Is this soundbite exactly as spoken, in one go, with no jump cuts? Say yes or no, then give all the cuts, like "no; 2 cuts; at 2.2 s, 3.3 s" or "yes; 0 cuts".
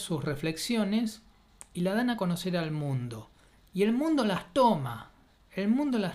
yes; 0 cuts